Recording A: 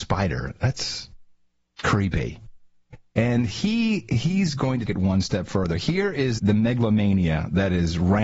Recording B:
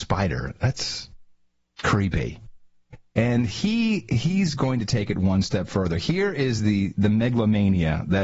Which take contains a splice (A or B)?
A